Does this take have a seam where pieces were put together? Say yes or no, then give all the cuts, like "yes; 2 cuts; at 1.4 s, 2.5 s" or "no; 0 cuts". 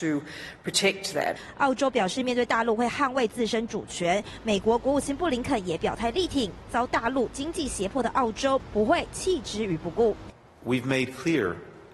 no; 0 cuts